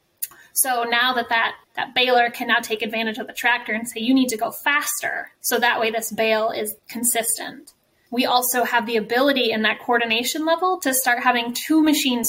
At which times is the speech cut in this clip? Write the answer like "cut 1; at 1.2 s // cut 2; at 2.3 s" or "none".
cut 1; at 1.6 s // cut 2; at 5.4 s // cut 3; at 6.8 s